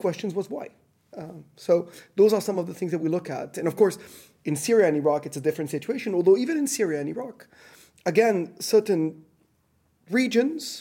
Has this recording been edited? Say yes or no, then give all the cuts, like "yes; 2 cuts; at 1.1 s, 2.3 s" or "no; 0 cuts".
no; 0 cuts